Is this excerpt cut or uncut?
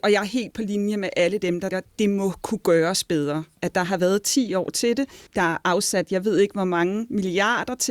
cut